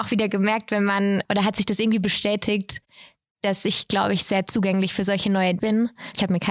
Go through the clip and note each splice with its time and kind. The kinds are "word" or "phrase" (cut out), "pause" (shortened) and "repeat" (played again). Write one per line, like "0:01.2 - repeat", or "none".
0:01.2 - word
0:05.6 - word